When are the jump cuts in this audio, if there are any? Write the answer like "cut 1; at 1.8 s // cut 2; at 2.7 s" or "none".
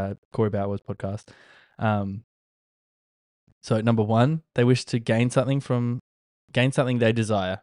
none